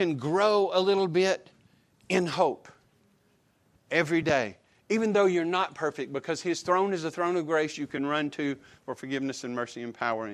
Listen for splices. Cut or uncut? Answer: uncut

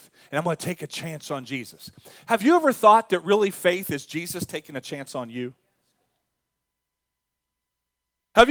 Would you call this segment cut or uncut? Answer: uncut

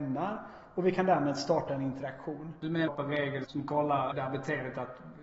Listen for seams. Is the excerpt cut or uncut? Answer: cut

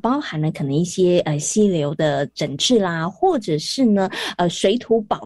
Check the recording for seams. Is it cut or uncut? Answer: uncut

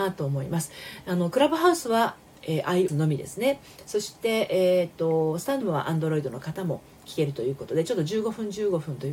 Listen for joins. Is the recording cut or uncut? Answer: cut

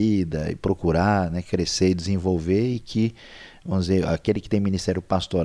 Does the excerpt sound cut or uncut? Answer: uncut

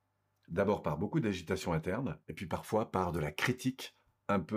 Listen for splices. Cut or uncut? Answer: cut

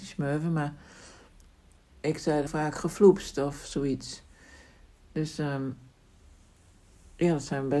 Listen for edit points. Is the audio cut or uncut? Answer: cut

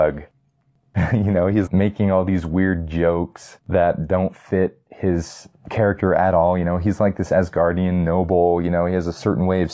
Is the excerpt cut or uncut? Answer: cut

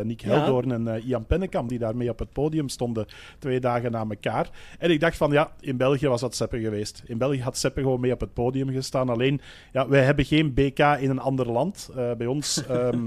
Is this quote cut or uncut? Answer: uncut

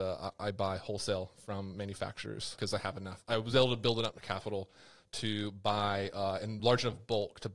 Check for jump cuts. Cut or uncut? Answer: uncut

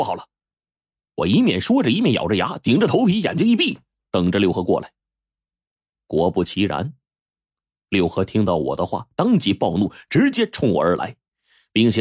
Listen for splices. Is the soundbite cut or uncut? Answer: uncut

